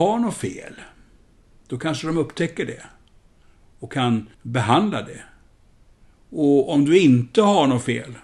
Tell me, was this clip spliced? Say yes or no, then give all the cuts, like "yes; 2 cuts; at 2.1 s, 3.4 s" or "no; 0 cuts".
yes; 1 cut; at 4.3 s